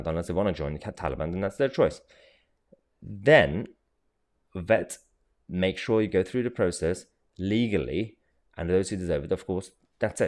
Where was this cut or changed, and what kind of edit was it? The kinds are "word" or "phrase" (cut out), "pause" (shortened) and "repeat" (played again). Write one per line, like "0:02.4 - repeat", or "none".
none